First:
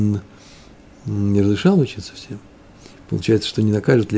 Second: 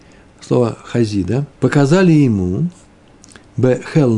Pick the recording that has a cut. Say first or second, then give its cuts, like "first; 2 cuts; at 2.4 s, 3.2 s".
second; 1 cut; at 1.5 s